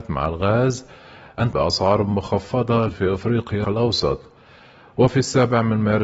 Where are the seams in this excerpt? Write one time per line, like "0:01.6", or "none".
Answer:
0:01.5
0:02.9
0:03.6